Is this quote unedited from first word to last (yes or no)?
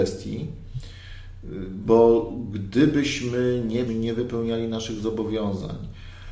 no